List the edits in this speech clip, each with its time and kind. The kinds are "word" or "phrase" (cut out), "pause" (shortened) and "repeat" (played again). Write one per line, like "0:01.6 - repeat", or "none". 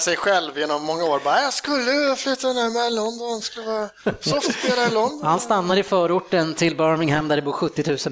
none